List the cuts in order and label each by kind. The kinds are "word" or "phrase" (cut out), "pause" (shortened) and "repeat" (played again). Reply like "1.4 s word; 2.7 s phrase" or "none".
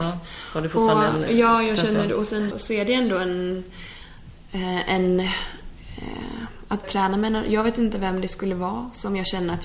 2.5 s word; 6.8 s word